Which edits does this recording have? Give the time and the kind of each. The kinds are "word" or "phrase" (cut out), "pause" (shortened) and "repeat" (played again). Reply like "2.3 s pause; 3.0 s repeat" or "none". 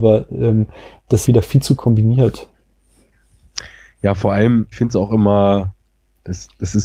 1.2 s word; 1.8 s word; 4.7 s word

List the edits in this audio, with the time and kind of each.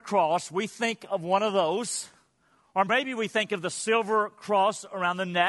none

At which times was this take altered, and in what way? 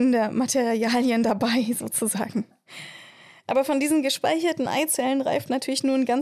none

